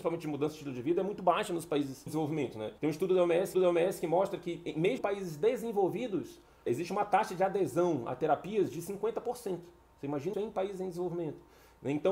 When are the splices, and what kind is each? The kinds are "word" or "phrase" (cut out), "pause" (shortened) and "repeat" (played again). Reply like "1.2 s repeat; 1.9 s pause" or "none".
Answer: 2.1 s word; 2.8 s pause; 3.5 s repeat; 5.0 s word; 6.7 s word; 10.3 s word